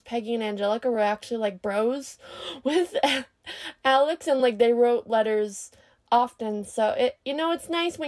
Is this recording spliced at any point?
no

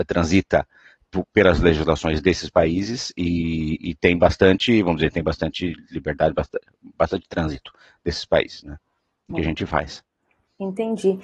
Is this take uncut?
no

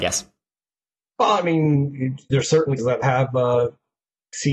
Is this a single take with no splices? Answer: no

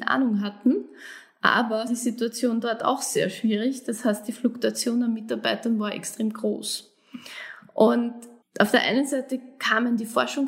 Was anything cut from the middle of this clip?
yes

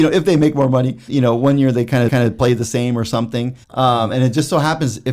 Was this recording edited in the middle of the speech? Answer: yes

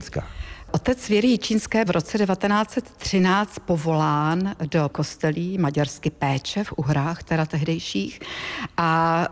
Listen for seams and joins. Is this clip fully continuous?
no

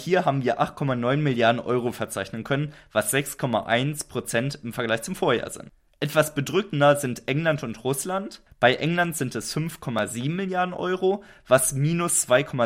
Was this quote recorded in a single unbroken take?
yes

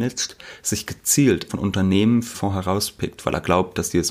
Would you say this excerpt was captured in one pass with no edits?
no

